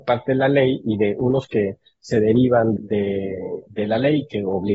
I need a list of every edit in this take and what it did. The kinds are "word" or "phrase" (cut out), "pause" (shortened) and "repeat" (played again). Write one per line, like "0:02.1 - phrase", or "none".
0:01.5 - word
0:02.8 - word